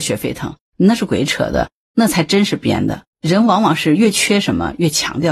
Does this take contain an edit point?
yes; 1 cut; at 3.1 s

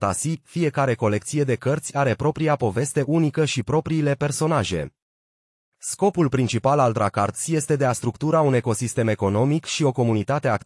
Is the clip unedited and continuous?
yes; 0 cuts

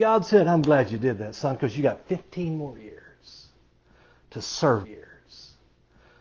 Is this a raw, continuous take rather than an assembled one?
no; 1 cut; at 4.8 s

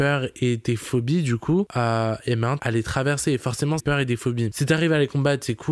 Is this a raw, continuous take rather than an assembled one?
no; 2 cuts; at 2.6 s, 3.8 s

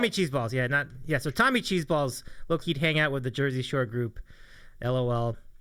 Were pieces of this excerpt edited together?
yes; 1 cut; at 2.6 s

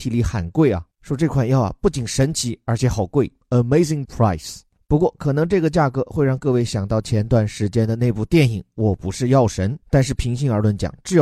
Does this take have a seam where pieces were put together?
yes; 3 cuts; at 0.9 s, 4.0 s, 9.8 s

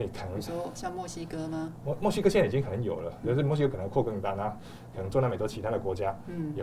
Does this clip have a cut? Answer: yes; 1 cut; at 3.2 s

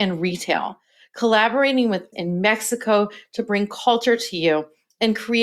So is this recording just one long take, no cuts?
no; 1 cut; at 2.1 s

